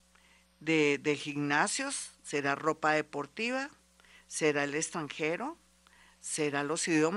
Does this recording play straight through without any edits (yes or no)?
yes